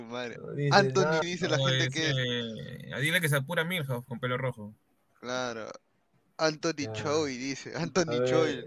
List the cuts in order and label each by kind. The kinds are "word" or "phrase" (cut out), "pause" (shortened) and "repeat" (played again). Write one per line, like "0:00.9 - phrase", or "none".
0:01.2 - word
0:04.1 - word